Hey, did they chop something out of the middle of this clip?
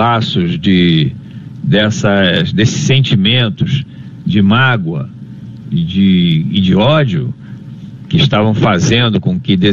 no; 0 cuts

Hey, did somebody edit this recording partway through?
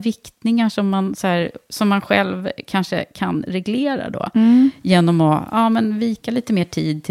no; 0 cuts

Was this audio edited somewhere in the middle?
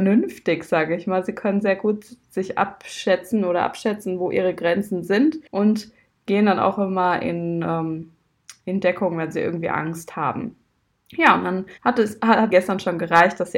yes; 3 cuts; at 5.5 s, 11.8 s, 12.5 s

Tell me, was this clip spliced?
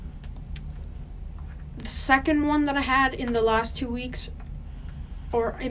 no; 0 cuts

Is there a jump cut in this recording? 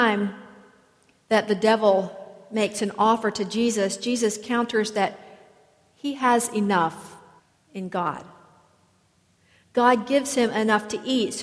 yes; 1 cut; at 7.4 s

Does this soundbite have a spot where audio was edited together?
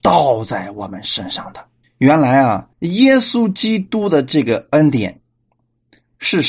yes; 2 cuts; at 1.8 s, 2.7 s

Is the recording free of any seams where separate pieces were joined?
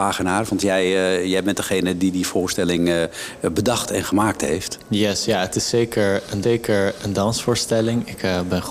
no; 1 cut; at 6.4 s

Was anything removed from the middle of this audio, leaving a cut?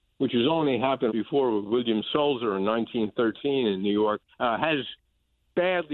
yes; 2 cuts; at 1.1 s, 4.3 s

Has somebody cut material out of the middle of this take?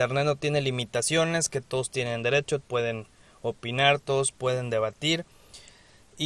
yes; 1 cut; at 2.6 s

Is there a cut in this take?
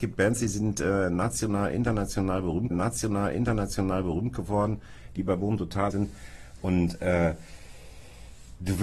yes; 2 cuts; at 2.7 s, 5.9 s

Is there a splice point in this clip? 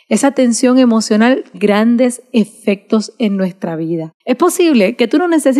yes; 2 cuts; at 1.5 s, 4.2 s

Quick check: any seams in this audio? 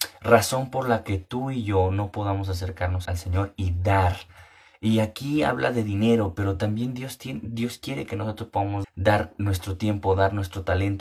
yes; 2 cuts; at 3.1 s, 8.8 s

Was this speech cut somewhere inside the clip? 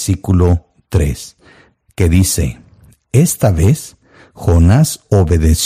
no; 0 cuts

